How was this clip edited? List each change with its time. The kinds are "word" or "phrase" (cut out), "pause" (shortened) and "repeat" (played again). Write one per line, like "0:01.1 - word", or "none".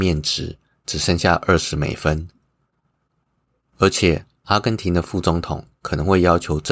none